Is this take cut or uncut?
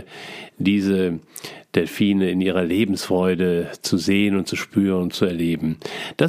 uncut